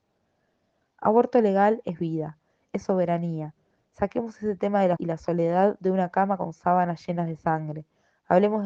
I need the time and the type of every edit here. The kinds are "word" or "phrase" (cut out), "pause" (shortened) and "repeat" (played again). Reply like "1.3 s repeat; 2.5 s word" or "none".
5.0 s word